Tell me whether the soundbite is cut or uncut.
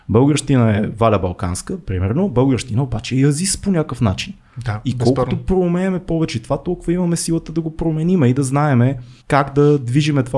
cut